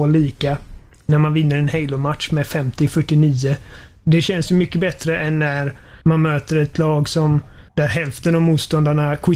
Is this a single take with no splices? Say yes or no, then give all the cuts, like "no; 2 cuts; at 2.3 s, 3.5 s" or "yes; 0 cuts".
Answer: no; 2 cuts; at 6.0 s, 7.7 s